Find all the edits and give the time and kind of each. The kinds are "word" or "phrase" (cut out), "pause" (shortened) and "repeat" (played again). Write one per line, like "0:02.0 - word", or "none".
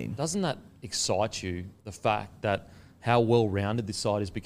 none